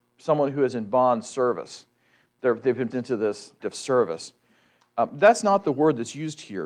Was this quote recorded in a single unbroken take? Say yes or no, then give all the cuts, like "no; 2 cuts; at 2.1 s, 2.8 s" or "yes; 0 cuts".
no; 2 cuts; at 2.9 s, 3.6 s